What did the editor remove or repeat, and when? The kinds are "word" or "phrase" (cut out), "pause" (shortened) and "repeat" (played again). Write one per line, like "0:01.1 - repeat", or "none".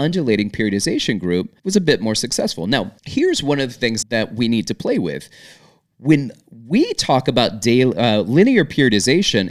0:01.6 - pause
0:03.0 - pause
0:04.0 - word